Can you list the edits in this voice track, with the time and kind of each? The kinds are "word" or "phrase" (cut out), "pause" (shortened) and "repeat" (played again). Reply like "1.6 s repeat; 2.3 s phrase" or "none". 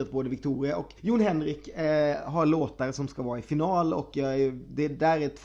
1.0 s pause